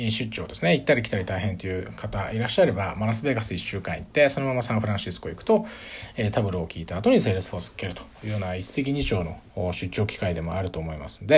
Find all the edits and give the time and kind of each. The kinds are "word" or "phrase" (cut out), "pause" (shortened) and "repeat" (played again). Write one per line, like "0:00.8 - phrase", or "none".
0:09.5 - pause